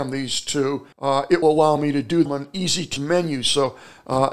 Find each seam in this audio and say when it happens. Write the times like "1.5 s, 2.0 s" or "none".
0.9 s, 1.4 s, 2.3 s, 3.0 s